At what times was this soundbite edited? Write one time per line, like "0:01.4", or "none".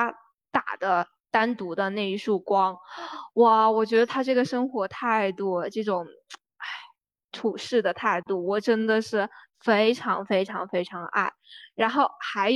none